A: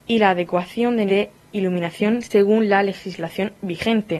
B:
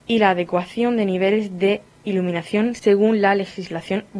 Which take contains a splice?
A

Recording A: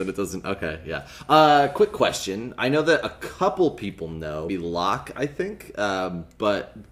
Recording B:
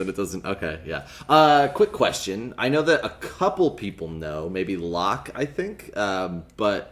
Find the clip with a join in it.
A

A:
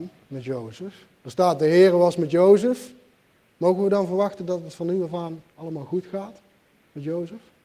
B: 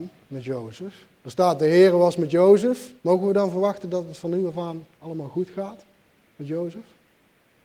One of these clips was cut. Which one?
B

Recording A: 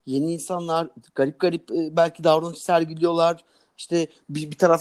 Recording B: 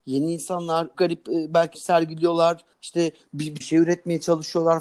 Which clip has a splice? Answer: B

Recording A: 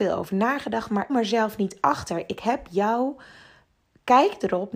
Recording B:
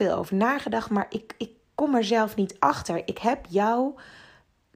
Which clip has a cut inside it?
A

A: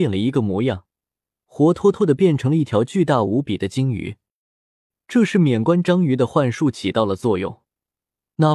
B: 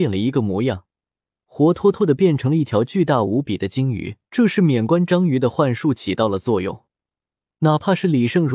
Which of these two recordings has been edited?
B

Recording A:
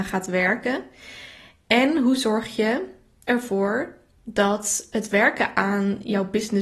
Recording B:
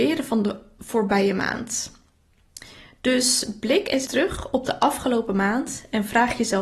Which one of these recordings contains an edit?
B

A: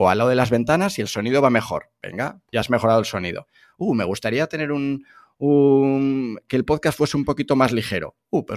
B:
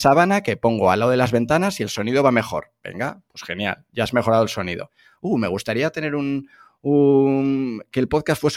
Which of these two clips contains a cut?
A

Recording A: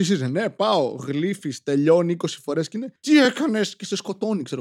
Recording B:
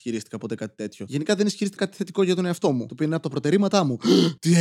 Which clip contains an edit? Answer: B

